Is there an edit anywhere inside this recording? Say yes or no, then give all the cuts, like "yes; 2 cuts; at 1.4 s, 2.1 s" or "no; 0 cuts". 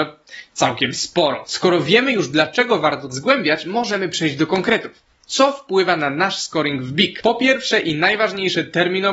yes; 1 cut; at 3.1 s